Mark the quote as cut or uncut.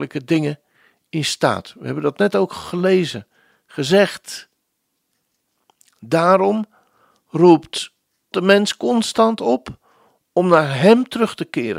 cut